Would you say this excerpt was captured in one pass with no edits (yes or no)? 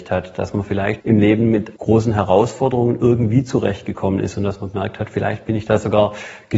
no